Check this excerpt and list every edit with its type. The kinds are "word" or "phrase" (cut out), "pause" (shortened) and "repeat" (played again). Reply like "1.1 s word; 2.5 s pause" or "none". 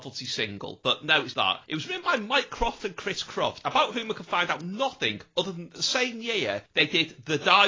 1.3 s word